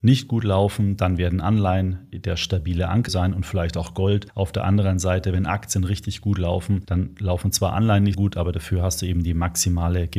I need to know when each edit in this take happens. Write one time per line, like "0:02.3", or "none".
0:03.1
0:08.1